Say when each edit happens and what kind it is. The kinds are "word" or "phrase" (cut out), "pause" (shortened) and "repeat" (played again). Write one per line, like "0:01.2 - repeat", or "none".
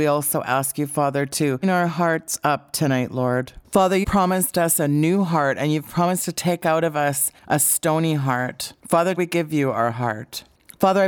0:01.6 - word
0:04.0 - word
0:09.2 - word